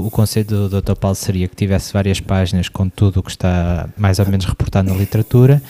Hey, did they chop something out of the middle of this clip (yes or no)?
no